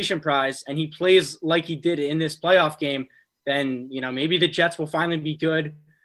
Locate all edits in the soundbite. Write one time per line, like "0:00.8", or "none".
none